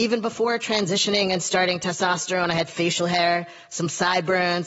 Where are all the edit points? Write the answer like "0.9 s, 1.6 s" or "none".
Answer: none